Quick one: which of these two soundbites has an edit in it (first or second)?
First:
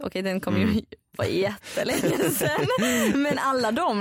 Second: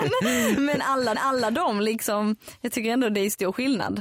second